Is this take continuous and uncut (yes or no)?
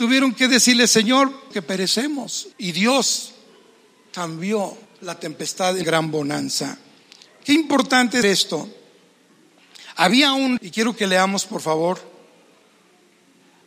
no